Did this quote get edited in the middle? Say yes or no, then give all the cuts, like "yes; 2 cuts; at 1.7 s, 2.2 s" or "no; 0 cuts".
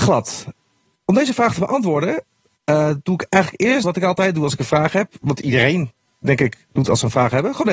yes; 1 cut; at 3.8 s